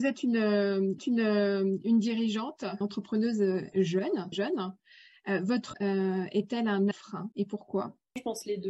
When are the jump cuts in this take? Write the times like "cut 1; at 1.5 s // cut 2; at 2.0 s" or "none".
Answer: cut 1; at 1.0 s // cut 2; at 2.8 s // cut 3; at 4.3 s // cut 4; at 5.7 s // cut 5; at 6.9 s // cut 6; at 7.3 s